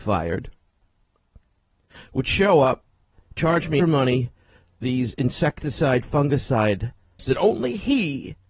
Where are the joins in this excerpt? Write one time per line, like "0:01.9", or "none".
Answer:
0:03.8
0:04.8
0:07.2